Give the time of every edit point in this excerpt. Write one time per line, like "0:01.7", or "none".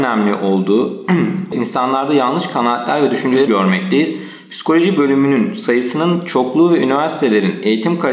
0:01.5
0:03.5